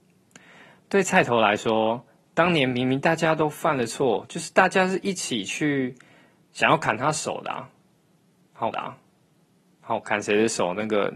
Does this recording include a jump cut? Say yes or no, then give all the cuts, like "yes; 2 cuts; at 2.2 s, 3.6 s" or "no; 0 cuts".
yes; 1 cut; at 8.7 s